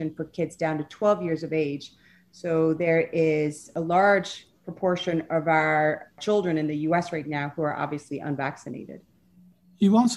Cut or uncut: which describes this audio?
uncut